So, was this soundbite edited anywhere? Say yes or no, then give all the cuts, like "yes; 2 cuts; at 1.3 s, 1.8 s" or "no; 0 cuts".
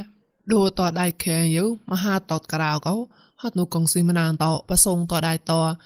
no; 0 cuts